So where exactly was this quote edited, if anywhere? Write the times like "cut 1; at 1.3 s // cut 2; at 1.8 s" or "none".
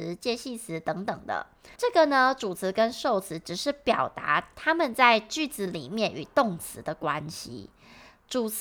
cut 1; at 1.7 s